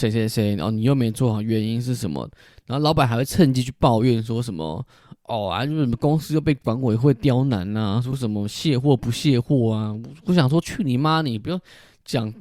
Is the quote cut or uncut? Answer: uncut